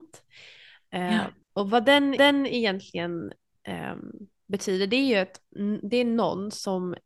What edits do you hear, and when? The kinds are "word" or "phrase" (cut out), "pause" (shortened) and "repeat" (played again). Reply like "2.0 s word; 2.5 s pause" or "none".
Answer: 1.4 s pause; 2.2 s repeat